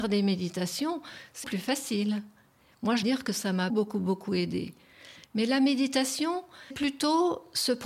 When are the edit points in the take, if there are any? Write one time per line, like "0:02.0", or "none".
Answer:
0:01.4
0:03.0
0:03.7
0:06.7